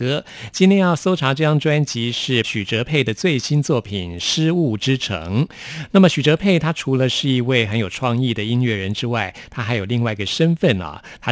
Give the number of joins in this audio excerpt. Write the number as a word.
one